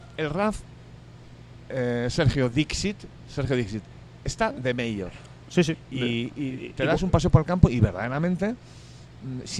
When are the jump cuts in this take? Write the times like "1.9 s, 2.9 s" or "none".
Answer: none